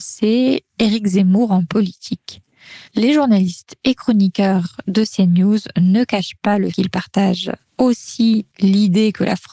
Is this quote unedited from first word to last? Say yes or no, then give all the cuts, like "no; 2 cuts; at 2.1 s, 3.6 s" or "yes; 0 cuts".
no; 3 cuts; at 2.9 s, 6.7 s, 7.7 s